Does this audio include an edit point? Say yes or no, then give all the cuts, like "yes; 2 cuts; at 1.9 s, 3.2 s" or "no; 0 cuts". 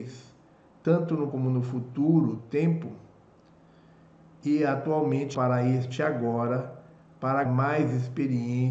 yes; 4 cuts; at 1.3 s, 2.4 s, 5.3 s, 7.5 s